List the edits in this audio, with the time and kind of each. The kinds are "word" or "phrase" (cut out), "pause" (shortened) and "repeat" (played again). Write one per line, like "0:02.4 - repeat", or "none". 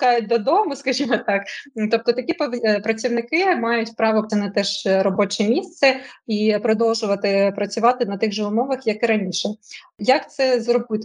0:04.3 - word